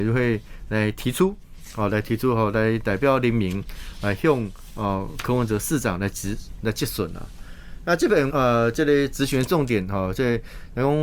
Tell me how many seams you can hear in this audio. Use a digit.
1